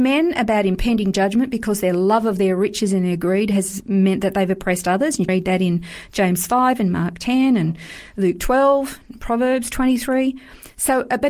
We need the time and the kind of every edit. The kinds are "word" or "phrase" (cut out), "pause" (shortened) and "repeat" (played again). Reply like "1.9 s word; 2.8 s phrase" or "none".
5.3 s word